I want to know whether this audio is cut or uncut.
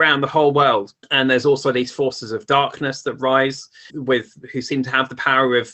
cut